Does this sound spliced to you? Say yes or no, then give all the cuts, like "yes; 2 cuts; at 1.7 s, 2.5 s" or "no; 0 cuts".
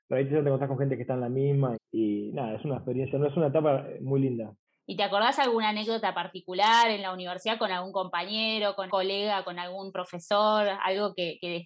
yes; 3 cuts; at 1.7 s, 4.7 s, 8.9 s